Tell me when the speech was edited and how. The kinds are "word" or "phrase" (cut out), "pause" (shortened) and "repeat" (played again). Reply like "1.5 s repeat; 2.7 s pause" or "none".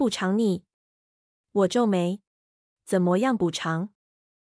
2.3 s pause

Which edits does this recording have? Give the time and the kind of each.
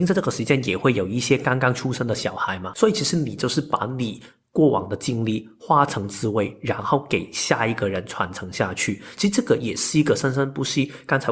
none

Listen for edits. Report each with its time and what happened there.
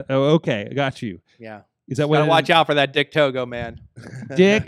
none

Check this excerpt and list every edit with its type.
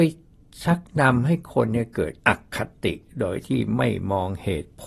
2.2 s pause

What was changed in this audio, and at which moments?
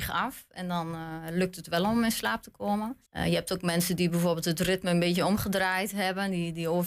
3.1 s pause

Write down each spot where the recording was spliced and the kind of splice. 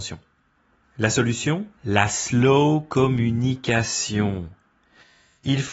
1.8 s pause

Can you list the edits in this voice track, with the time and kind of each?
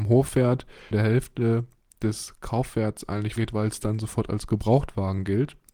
0.9 s word; 3.4 s word

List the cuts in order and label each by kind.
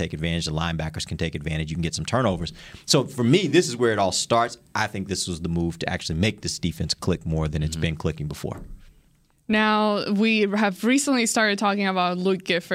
none

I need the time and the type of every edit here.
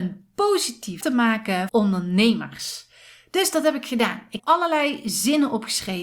1.0 s word; 1.7 s word; 4.4 s word

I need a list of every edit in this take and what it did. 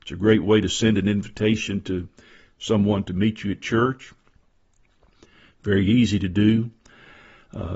none

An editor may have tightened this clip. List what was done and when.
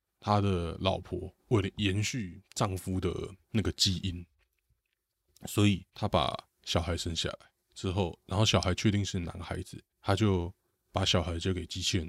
3.4 s pause; 5.9 s pause; 9.9 s pause

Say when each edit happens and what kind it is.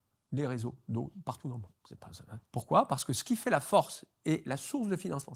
2.5 s pause

